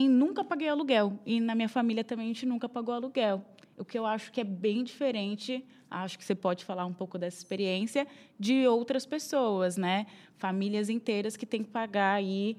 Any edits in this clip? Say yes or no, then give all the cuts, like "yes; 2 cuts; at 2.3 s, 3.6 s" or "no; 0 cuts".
no; 0 cuts